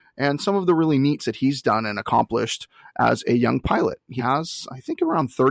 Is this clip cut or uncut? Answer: cut